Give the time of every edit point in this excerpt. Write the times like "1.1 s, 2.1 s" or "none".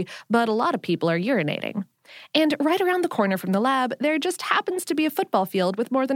none